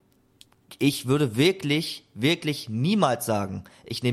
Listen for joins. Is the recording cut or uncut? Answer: uncut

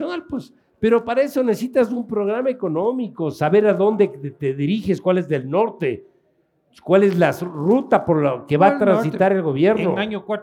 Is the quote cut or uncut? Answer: uncut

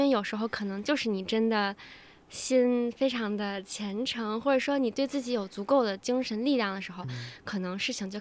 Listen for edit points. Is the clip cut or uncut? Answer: uncut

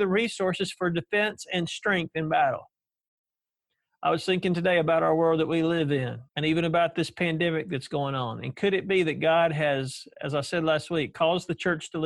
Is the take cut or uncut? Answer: cut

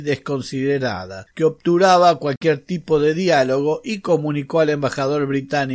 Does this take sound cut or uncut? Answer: cut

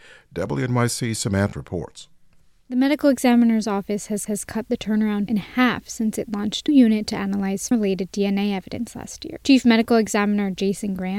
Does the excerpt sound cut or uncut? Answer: cut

